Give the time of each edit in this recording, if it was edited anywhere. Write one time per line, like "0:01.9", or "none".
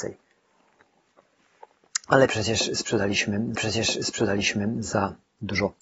0:03.6